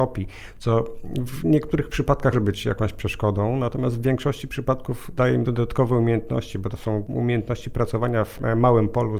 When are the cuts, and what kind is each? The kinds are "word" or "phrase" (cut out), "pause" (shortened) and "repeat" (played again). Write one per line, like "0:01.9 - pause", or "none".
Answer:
0:02.3 - word